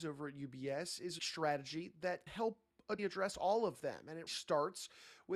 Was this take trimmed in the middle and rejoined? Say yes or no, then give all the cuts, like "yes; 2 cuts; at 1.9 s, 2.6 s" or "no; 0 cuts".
yes; 4 cuts; at 1.2 s, 2.3 s, 3.0 s, 4.3 s